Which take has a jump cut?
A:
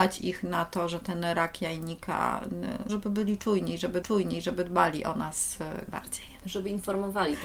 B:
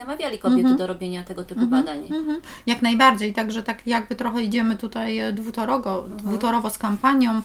A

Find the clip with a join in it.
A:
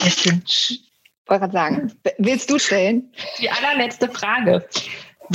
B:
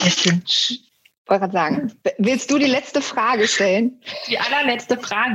A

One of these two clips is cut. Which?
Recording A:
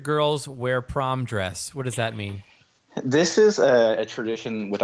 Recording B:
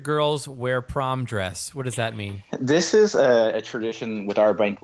B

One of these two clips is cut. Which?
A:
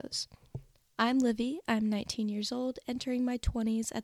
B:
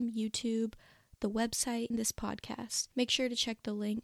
B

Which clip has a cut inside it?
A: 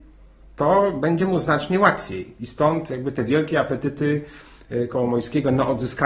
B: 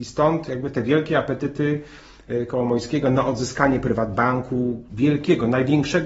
B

